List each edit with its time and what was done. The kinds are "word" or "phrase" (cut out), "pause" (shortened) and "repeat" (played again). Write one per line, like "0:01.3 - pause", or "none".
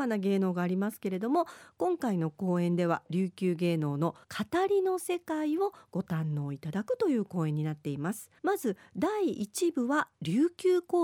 0:04.2 - pause
0:08.4 - pause